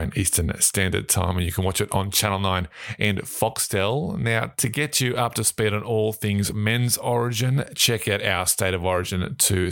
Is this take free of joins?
yes; 0 cuts

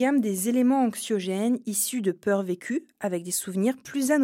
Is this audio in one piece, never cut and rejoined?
yes; 0 cuts

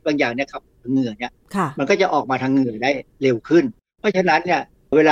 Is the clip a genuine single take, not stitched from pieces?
yes; 0 cuts

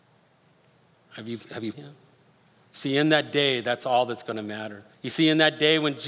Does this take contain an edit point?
yes; 2 cuts; at 1.7 s, 4.9 s

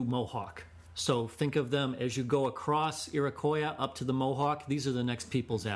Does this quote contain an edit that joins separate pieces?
no; 0 cuts

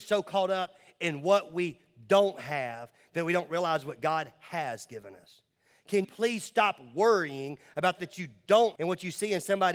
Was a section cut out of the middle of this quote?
yes; 3 cuts; at 6.0 s, 8.0 s, 8.7 s

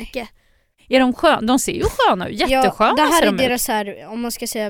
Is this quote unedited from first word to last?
yes; 0 cuts

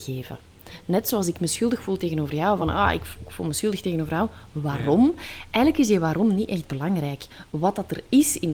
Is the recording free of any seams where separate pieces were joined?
yes; 0 cuts

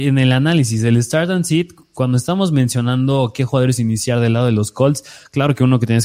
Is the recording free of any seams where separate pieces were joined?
yes; 0 cuts

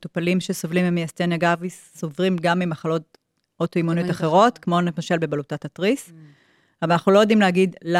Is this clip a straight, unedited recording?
yes; 0 cuts

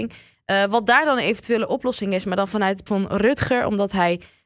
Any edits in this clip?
yes; 1 cut; at 2.9 s

